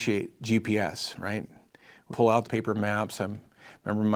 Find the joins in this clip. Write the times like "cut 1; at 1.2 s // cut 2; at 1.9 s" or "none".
cut 1; at 2.1 s // cut 2; at 2.4 s

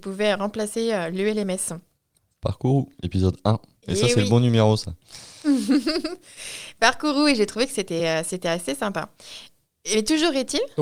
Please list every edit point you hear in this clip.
none

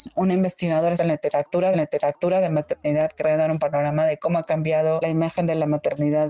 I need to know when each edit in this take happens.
cut 1; at 0.9 s // cut 2; at 1.7 s

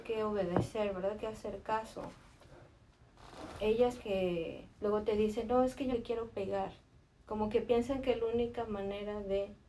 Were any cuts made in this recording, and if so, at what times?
cut 1; at 1.2 s // cut 2; at 4.0 s // cut 3; at 4.7 s // cut 4; at 5.9 s

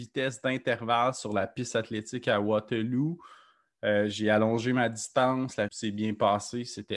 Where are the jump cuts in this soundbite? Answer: cut 1; at 5.7 s

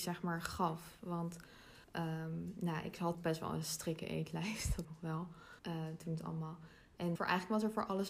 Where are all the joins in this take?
cut 1; at 1.8 s // cut 2; at 3.1 s // cut 3; at 4.8 s // cut 4; at 5.6 s // cut 5; at 7.2 s

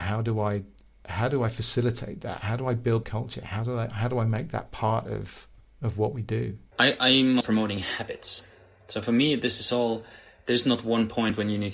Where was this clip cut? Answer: cut 1; at 3.0 s // cut 2; at 5.6 s // cut 3; at 6.7 s // cut 4; at 7.4 s

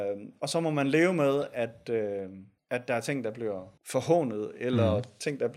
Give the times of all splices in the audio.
cut 1; at 2.6 s // cut 2; at 3.8 s

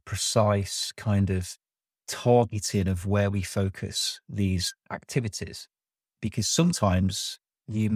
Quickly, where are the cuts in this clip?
none

